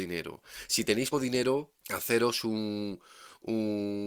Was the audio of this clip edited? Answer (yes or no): yes